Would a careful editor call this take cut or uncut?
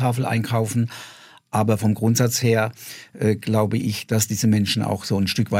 uncut